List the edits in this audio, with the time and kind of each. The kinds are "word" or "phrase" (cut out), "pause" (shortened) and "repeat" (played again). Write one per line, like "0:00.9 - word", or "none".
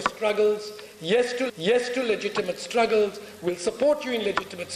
0:01.5 - repeat